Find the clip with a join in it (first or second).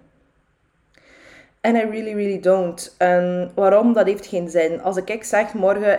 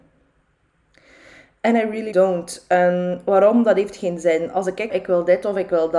second